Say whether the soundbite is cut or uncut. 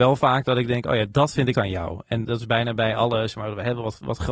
cut